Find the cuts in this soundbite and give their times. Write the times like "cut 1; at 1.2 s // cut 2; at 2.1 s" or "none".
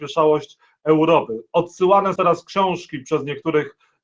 cut 1; at 2.2 s